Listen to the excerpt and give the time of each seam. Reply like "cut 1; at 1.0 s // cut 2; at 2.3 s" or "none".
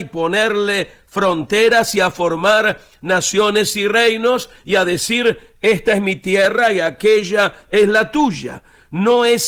none